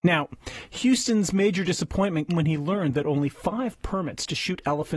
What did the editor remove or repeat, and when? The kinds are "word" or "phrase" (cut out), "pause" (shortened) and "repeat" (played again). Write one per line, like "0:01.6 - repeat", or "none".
0:02.3 - word